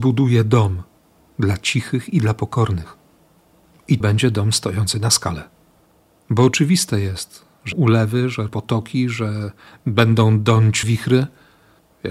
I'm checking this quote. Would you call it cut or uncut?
cut